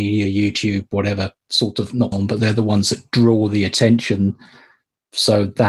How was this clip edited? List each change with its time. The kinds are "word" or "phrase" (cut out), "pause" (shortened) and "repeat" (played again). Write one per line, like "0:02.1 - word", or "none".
0:02.1 - word